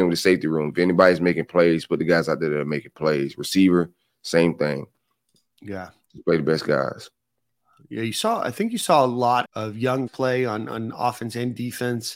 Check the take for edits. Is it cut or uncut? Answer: cut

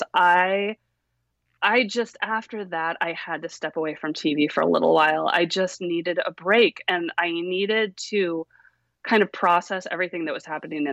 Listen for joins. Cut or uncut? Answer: uncut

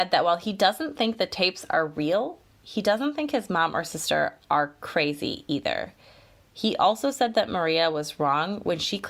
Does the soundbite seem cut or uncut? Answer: uncut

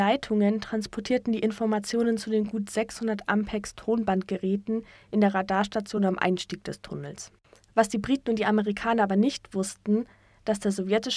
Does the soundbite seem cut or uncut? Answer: uncut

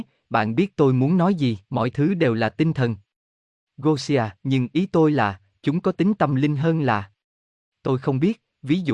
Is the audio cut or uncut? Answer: cut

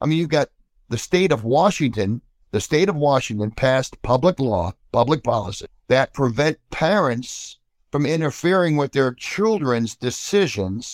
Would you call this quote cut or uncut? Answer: uncut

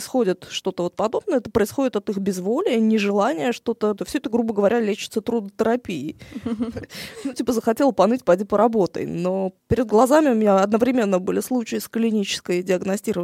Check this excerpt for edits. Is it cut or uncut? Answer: cut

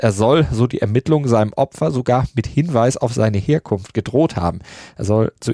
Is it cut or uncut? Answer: uncut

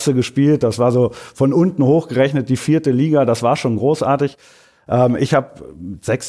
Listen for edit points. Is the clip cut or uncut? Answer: uncut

